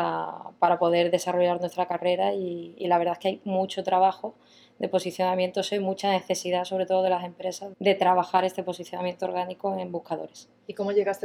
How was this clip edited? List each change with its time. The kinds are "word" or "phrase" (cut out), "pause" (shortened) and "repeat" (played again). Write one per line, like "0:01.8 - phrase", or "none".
0:07.7 - word